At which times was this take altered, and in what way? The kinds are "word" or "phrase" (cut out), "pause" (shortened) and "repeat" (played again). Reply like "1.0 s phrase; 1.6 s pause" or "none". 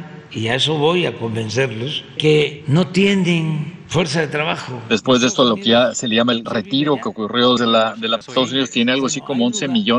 2.2 s word; 6.4 s word; 7.6 s word; 8.2 s word